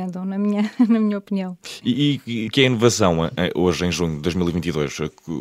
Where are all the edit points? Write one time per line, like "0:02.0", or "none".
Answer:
0:02.5